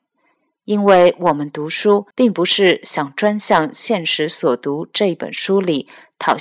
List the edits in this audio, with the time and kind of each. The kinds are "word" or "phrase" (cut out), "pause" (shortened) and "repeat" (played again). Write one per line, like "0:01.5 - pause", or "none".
0:02.1 - pause